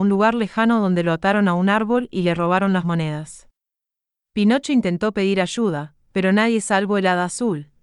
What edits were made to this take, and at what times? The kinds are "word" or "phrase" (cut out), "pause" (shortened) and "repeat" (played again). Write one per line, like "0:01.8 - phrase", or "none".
none